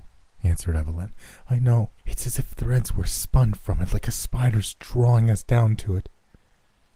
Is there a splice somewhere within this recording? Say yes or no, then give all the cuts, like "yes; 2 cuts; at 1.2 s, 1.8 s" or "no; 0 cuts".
yes; 1 cut; at 2.0 s